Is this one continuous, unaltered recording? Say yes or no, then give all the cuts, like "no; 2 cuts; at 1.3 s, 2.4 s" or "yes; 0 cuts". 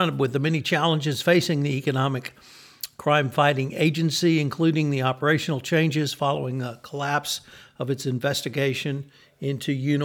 yes; 0 cuts